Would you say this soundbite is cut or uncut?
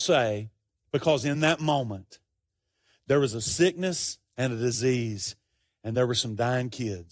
uncut